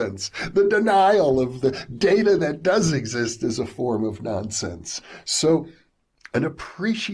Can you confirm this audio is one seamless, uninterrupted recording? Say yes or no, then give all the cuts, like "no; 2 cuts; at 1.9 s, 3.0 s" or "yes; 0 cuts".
yes; 0 cuts